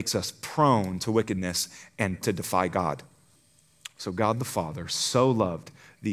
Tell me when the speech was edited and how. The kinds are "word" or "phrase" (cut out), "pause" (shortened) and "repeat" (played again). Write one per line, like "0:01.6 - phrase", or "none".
0:02.2 - word
0:03.4 - pause